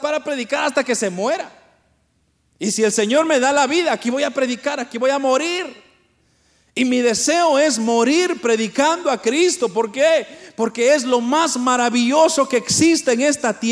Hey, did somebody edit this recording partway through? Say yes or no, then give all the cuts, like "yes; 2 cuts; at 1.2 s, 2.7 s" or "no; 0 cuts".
no; 0 cuts